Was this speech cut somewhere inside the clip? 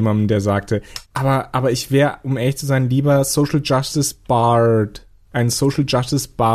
yes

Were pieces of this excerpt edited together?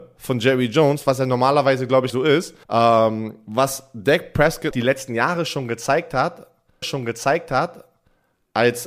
yes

